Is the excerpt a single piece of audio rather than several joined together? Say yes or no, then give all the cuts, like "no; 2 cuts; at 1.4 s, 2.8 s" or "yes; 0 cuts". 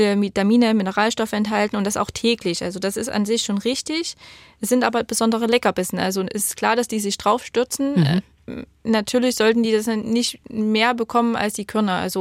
yes; 0 cuts